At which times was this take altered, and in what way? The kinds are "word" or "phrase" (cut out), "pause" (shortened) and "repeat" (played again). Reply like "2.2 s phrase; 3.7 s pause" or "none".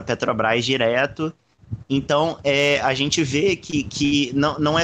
none

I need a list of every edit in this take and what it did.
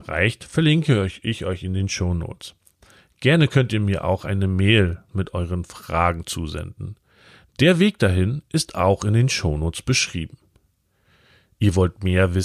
none

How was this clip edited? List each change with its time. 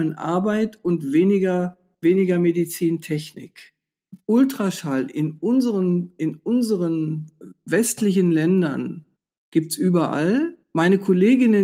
1.9 s pause; 9.2 s pause; 10.6 s pause

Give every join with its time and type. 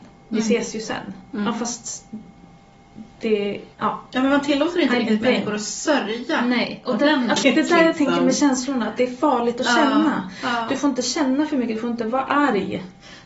3.7 s pause; 7.4 s word

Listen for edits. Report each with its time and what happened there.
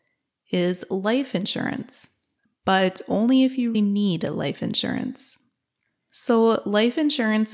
3.7 s word

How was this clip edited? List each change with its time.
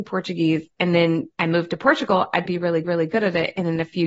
1.3 s pause; 2.5 s word; 2.8 s repeat

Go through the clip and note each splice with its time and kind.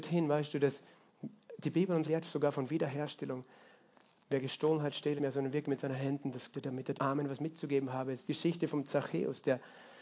2.0 s word; 5.2 s word; 6.5 s word; 6.9 s word; 8.3 s word

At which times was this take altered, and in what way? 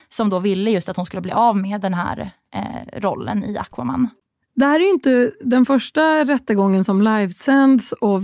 none

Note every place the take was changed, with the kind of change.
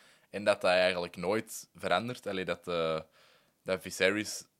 none

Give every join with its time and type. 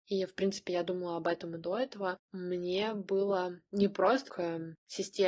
4.3 s word

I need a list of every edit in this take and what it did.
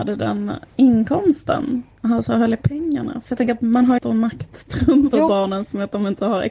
4.0 s phrase; 5.1 s word

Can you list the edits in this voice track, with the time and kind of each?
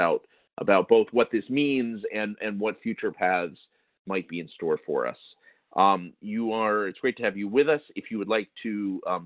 none

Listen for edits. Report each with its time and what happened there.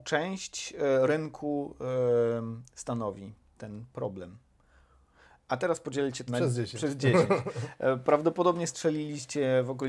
6.3 s word

